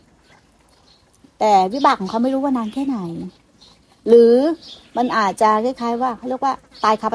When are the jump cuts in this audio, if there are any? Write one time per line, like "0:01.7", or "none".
none